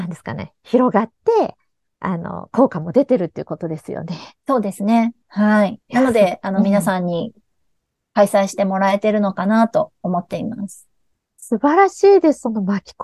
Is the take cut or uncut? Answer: uncut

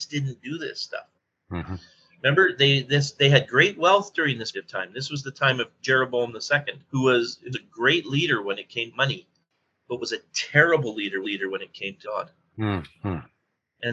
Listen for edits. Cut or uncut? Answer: cut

